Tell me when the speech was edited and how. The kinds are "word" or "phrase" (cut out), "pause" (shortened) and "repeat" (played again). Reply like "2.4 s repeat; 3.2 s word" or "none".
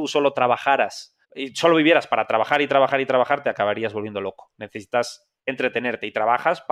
1.2 s pause; 5.4 s pause